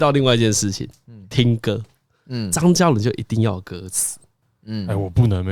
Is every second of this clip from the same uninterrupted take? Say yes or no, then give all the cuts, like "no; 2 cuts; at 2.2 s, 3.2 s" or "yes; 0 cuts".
yes; 0 cuts